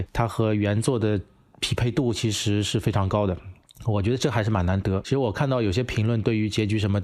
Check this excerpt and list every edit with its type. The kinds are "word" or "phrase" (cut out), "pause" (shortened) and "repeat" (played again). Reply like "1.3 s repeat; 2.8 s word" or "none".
none